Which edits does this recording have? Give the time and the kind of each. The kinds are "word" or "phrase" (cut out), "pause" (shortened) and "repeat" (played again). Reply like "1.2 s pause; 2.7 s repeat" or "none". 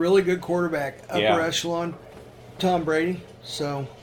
2.6 s word